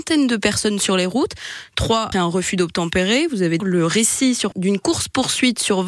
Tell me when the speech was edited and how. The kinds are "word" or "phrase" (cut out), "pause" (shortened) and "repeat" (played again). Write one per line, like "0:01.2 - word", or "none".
0:02.1 - word
0:03.6 - word
0:04.5 - word